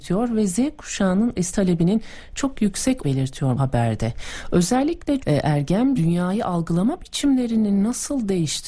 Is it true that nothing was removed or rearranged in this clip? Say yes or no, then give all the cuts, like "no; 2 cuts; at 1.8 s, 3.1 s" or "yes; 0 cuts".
no; 5 cuts; at 1.5 s, 3.0 s, 3.6 s, 5.2 s, 6.0 s